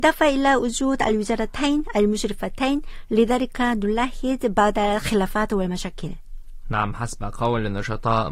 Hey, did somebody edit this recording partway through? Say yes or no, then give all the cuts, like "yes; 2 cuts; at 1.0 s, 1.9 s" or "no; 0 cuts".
no; 0 cuts